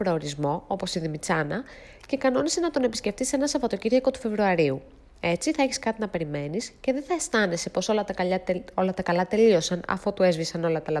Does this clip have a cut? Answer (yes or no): no